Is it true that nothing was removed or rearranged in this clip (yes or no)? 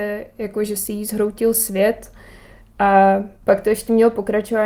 yes